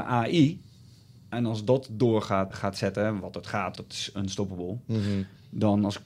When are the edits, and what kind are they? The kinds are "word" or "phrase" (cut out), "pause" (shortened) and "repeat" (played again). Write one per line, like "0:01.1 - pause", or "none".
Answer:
0:01.3 - word
0:02.5 - word
0:03.8 - word